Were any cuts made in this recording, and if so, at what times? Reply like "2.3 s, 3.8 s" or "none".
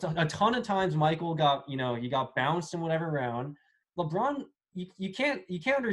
none